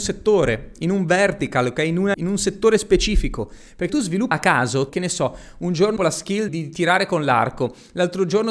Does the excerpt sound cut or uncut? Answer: cut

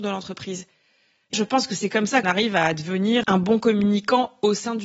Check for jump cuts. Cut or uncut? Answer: cut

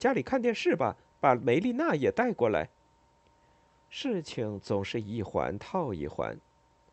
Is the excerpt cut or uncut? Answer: cut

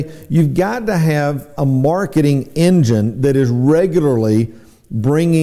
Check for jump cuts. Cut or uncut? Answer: uncut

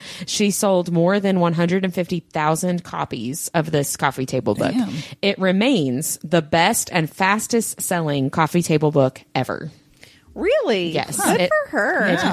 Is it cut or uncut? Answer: uncut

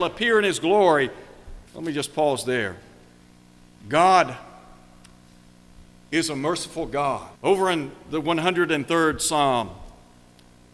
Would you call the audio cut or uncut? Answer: cut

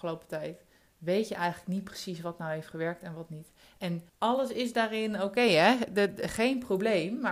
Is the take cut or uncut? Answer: cut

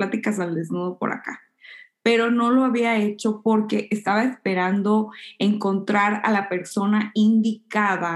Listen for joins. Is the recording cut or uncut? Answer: uncut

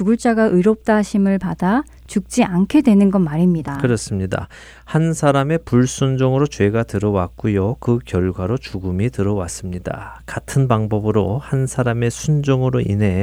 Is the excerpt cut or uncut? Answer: uncut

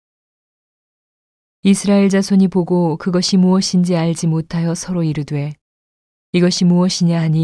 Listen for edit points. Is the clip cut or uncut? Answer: uncut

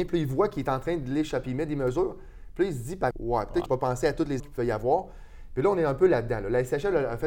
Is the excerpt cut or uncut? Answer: cut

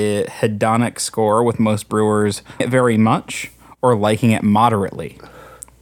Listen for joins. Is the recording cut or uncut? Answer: cut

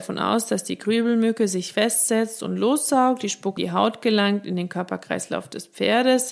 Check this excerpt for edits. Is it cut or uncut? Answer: cut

